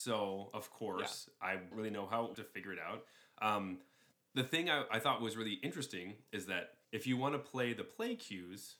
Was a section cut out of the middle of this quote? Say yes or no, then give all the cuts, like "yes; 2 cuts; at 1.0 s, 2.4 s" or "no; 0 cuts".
yes; 3 cuts; at 1.7 s, 2.3 s, 6.8 s